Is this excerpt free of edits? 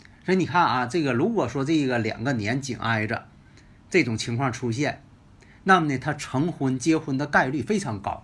yes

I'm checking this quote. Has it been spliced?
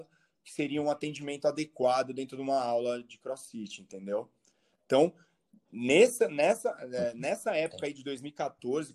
no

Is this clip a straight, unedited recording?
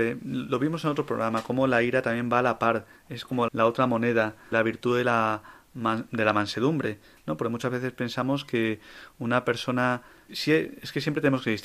no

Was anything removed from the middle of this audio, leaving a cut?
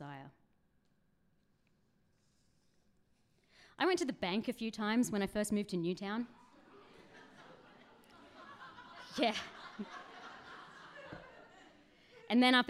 no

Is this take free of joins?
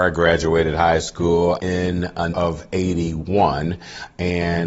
no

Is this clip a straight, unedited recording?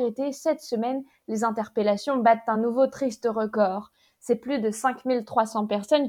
yes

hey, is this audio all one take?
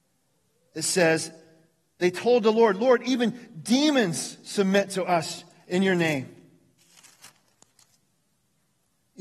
yes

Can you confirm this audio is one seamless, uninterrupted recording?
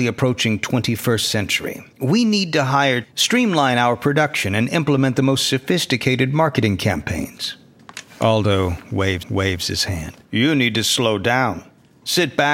no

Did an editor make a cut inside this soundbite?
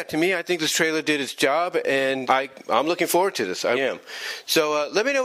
yes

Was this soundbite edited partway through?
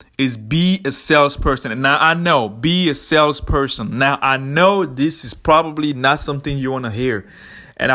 no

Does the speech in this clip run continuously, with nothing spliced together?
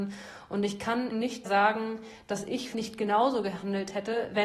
no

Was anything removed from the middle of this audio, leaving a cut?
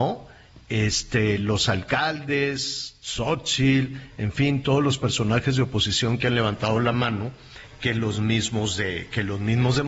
no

